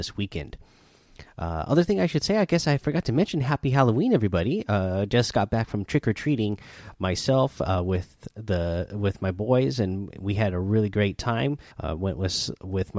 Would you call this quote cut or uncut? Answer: cut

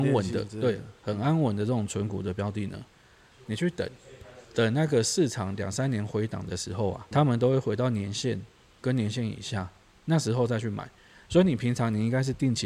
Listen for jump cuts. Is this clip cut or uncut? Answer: cut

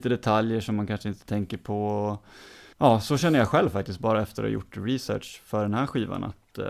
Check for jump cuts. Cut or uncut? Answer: cut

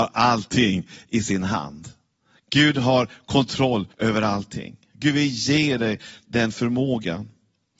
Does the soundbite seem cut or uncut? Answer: cut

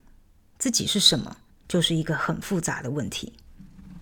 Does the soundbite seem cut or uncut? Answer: cut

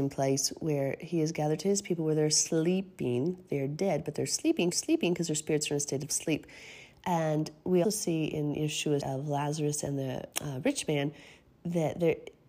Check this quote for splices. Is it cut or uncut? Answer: cut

